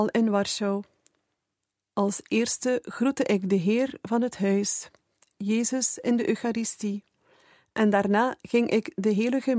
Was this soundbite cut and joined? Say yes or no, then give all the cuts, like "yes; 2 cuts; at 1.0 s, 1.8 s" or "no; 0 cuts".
no; 0 cuts